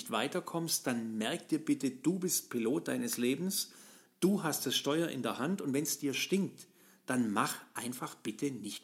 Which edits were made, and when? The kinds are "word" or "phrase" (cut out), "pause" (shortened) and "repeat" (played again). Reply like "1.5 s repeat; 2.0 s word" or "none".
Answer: none